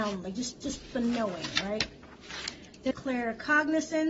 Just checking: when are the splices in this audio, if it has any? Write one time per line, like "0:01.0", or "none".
0:00.9
0:02.9